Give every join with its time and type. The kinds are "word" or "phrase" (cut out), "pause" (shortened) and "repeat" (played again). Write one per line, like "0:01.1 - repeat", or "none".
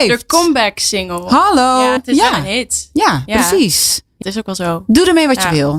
0:02.0 - word
0:04.2 - word